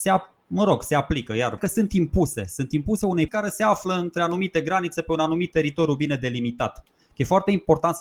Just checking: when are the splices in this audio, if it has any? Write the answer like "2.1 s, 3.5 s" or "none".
1.6 s, 3.3 s